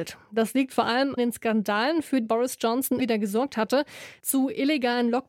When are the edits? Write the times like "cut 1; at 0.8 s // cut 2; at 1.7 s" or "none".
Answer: cut 1; at 1.2 s // cut 2; at 2.2 s // cut 3; at 3.0 s